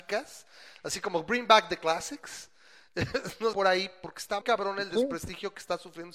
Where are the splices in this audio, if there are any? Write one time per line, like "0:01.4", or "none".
0:03.5
0:04.4